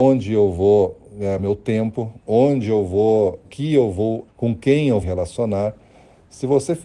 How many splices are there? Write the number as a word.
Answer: five